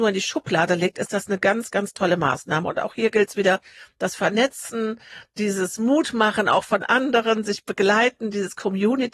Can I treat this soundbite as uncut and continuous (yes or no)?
yes